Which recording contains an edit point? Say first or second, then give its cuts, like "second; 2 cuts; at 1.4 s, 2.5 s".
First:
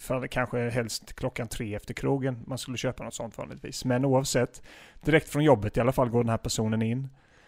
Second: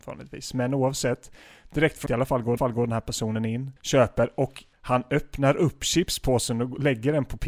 second; 4 cuts; at 2.1 s, 2.6 s, 3.8 s, 4.7 s